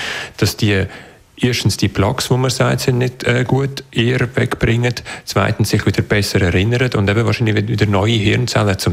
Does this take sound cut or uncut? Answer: uncut